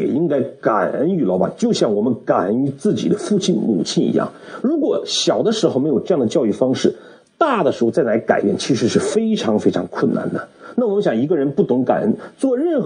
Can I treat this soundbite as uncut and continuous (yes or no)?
yes